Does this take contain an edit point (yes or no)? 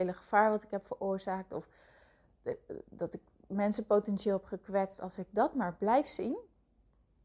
no